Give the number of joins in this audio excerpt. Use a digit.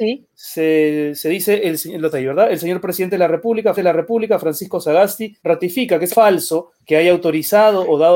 5